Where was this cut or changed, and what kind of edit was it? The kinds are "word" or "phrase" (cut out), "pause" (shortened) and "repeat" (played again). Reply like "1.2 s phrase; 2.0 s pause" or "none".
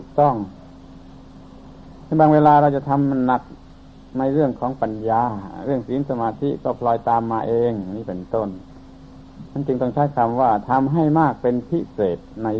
3.9 s pause